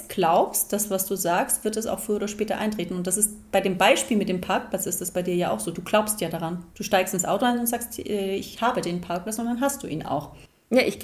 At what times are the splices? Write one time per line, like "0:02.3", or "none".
0:06.7